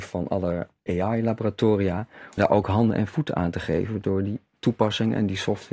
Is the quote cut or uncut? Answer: cut